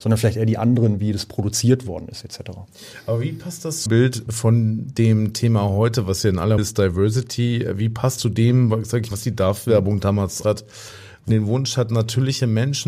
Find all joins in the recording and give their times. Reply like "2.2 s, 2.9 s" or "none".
3.9 s, 4.3 s, 6.6 s, 8.2 s, 9.1 s, 10.4 s, 11.3 s